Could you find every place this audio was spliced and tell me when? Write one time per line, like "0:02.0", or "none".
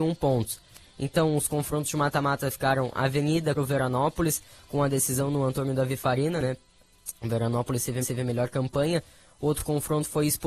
0:03.5
0:08.0